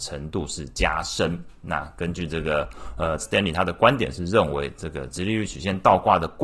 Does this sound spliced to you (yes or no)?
yes